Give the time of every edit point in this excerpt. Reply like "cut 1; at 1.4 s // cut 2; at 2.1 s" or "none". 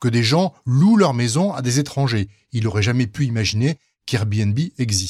none